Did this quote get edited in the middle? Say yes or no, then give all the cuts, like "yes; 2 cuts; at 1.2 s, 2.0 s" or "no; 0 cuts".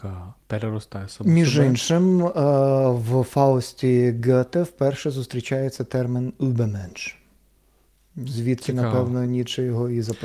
no; 0 cuts